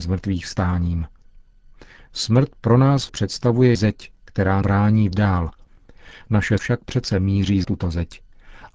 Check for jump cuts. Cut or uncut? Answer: cut